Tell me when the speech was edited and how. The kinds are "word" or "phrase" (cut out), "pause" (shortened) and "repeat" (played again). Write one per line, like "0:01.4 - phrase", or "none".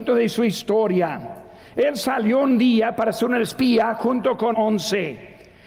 0:04.5 - word